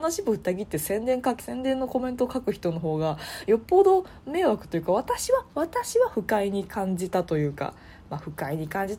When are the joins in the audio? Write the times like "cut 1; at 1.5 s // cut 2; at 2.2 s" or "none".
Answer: cut 1; at 1.4 s

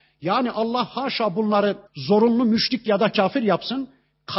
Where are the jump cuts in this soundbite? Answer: cut 1; at 1.9 s

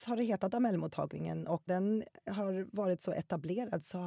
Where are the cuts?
cut 1; at 1.7 s

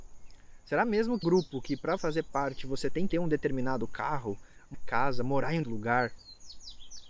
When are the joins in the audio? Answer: cut 1; at 1.2 s // cut 2; at 2.0 s // cut 3; at 3.1 s // cut 4; at 4.7 s // cut 5; at 5.6 s

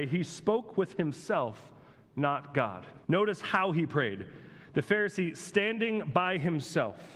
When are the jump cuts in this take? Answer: cut 1; at 3.0 s

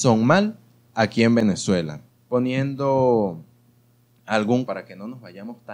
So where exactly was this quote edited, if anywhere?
cut 1; at 2.1 s // cut 2; at 4.7 s

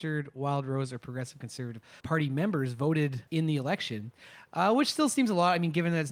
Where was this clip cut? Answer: cut 1; at 2.0 s // cut 2; at 3.3 s

